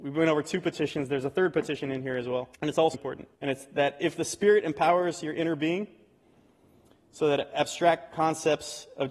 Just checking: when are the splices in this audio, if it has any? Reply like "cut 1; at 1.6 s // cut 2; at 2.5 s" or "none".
cut 1; at 2.5 s // cut 2; at 2.9 s // cut 3; at 3.3 s